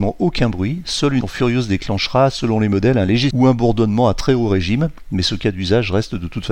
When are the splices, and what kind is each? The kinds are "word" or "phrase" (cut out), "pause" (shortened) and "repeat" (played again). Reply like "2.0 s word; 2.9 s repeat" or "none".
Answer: 1.2 s word; 3.3 s word